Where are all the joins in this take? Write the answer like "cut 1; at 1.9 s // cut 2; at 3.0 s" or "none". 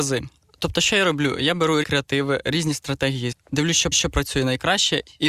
cut 1; at 1.8 s // cut 2; at 3.3 s // cut 3; at 3.9 s